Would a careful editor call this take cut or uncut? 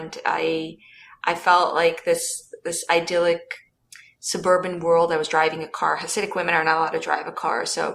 uncut